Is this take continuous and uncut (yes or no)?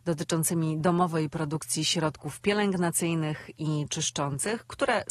yes